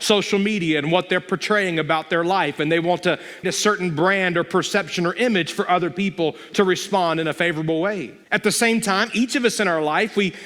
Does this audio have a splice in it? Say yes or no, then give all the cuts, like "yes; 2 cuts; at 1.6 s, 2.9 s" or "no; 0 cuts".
yes; 2 cuts; at 3.4 s, 8.2 s